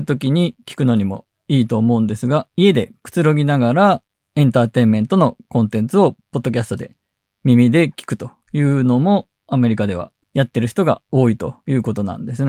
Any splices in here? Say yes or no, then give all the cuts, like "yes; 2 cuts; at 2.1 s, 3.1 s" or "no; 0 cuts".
yes; 1 cut; at 2.5 s